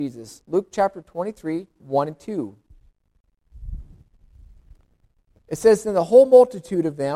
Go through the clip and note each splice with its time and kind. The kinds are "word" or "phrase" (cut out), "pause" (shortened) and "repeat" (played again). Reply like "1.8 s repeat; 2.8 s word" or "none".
1.8 s word